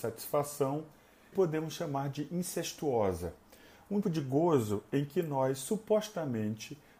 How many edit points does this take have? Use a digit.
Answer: 2